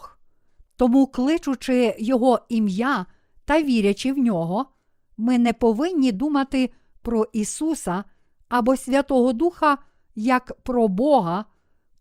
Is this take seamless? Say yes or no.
yes